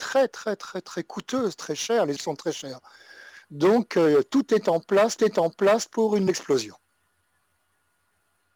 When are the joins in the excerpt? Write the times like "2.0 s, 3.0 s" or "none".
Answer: 2.2 s, 5.2 s, 6.3 s